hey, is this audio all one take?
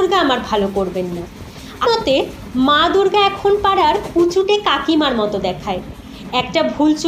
no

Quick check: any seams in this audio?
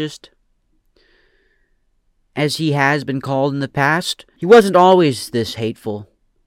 no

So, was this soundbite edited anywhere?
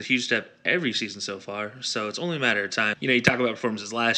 no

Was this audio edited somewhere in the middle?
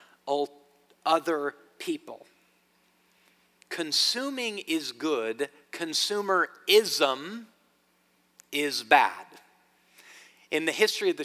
no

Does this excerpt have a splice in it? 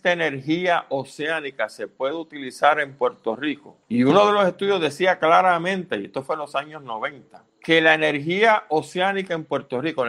yes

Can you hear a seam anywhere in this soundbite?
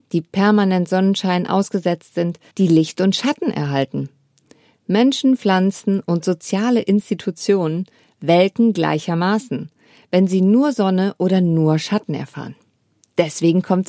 yes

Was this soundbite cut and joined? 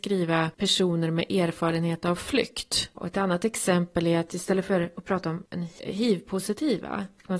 no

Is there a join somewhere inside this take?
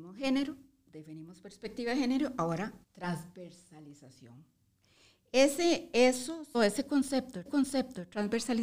yes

